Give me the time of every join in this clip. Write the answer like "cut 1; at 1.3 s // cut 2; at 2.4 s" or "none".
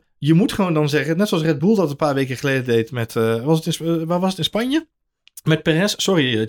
none